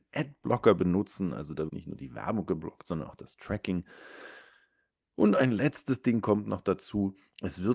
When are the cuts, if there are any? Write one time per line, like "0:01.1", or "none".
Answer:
0:01.7